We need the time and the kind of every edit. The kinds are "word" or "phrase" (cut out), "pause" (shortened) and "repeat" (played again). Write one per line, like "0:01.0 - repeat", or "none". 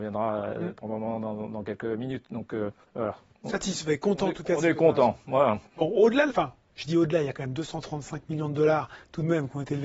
0:02.8 - pause
0:06.3 - phrase